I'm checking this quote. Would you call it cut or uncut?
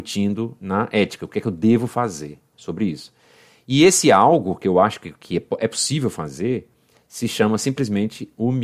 uncut